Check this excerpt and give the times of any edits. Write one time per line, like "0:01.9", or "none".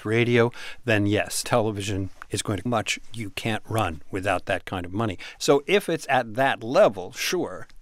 0:01.4
0:02.7